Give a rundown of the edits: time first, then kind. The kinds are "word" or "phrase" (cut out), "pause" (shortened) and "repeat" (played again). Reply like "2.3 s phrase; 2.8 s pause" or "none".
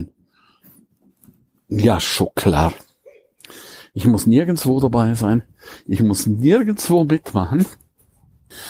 none